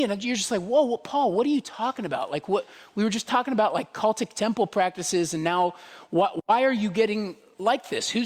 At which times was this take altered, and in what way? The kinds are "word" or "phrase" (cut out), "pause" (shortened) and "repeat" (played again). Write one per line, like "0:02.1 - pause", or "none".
none